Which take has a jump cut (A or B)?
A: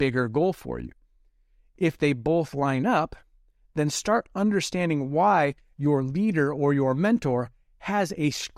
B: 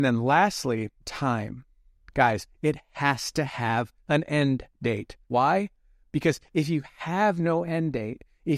B